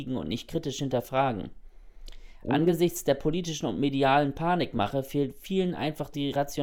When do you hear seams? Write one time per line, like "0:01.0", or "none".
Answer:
none